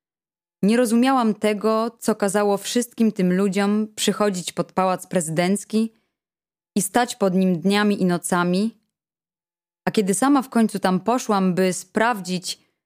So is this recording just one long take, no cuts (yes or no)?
yes